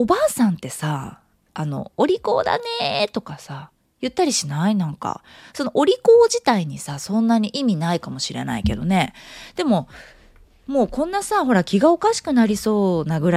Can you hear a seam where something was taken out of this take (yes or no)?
no